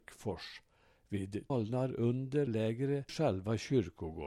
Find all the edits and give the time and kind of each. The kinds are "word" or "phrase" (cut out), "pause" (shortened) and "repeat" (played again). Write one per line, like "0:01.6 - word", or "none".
0:01.5 - word
0:02.5 - word
0:03.1 - word